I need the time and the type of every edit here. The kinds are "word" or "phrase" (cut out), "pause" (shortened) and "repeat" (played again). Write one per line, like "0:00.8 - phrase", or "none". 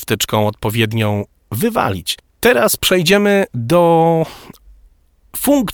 none